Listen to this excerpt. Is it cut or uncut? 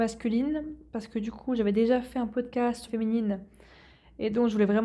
cut